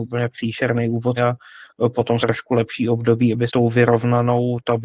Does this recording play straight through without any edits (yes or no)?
no